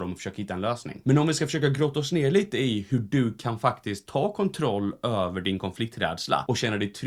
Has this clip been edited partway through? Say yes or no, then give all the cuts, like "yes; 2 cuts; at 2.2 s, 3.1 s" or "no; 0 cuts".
no; 0 cuts